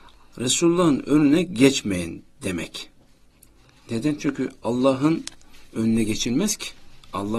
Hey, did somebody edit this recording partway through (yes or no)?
no